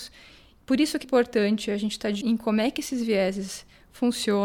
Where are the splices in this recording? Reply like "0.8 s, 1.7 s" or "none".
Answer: 1.0 s, 2.2 s